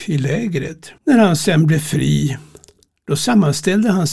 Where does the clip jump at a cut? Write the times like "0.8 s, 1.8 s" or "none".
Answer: 1.0 s

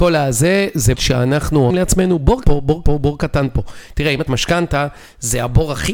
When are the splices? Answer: 0.9 s, 1.7 s, 2.4 s, 2.8 s, 4.3 s

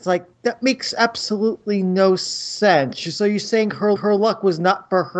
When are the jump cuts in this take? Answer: 4.0 s

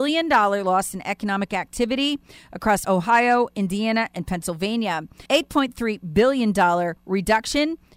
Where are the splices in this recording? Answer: 2.8 s, 5.3 s, 7.0 s

